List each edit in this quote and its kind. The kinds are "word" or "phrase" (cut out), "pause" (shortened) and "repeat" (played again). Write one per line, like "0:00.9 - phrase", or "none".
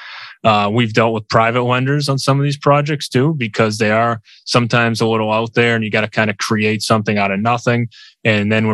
none